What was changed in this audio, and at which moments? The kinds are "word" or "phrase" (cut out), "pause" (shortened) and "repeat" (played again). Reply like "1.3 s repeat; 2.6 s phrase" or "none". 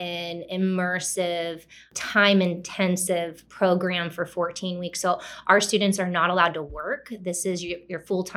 none